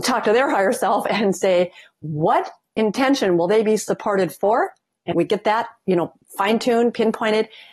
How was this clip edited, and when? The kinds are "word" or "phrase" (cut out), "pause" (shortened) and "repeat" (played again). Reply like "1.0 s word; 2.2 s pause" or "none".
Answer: 5.1 s word